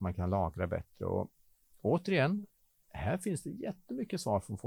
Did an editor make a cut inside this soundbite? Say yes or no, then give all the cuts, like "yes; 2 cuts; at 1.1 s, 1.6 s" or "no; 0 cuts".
no; 0 cuts